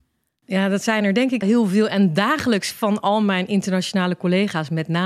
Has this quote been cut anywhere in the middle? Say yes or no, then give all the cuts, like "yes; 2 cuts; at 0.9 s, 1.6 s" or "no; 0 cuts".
yes; 1 cut; at 1.4 s